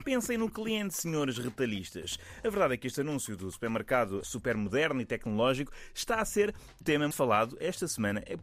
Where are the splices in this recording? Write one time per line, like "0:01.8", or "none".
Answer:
0:04.2
0:06.8
0:07.1